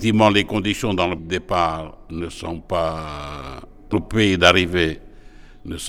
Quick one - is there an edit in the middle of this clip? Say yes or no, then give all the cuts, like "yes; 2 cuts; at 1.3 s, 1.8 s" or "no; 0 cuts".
yes; 2 cuts; at 1.2 s, 3.9 s